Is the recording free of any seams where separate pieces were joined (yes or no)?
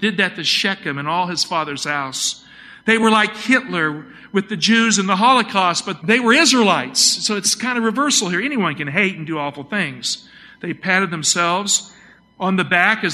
yes